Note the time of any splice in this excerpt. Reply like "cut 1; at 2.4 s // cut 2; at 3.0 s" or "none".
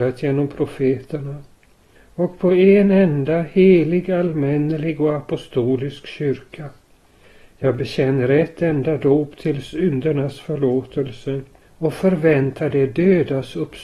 none